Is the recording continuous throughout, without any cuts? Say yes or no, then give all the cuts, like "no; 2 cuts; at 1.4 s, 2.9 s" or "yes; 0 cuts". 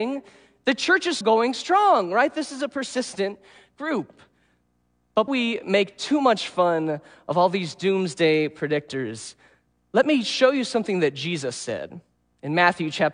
no; 2 cuts; at 1.2 s, 5.3 s